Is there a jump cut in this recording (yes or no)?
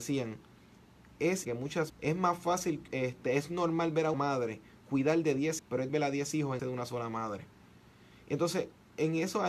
yes